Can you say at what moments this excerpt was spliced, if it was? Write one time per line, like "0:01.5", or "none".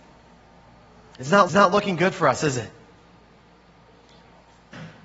0:01.5